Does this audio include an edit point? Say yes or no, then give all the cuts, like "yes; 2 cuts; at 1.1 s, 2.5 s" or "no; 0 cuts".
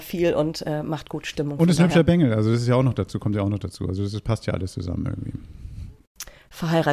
no; 0 cuts